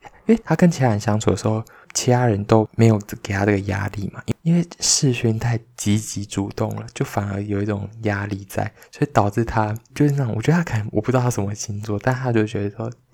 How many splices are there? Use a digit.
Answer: 0